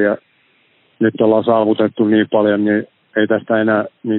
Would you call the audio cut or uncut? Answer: uncut